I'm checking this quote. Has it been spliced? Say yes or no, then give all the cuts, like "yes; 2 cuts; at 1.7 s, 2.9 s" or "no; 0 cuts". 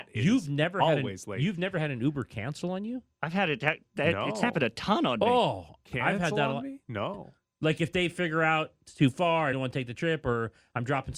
yes; 1 cut; at 9.5 s